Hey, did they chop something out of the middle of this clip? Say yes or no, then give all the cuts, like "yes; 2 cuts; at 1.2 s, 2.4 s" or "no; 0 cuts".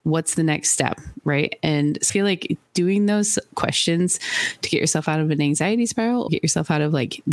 yes; 2 cuts; at 2.1 s, 6.3 s